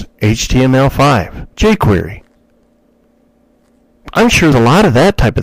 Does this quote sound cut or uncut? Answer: cut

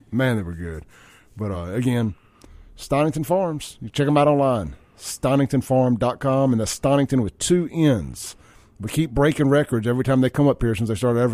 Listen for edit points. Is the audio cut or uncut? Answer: uncut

